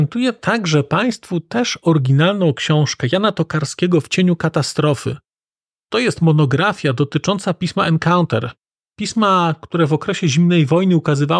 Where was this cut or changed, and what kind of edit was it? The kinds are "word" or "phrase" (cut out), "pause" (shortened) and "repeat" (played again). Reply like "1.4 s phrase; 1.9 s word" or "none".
none